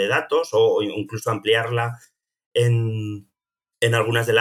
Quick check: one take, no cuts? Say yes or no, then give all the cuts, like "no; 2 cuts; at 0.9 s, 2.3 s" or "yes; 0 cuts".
yes; 0 cuts